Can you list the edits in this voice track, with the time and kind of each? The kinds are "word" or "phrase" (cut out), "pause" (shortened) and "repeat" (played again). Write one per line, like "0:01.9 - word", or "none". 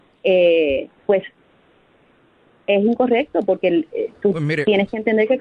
0:01.0 - pause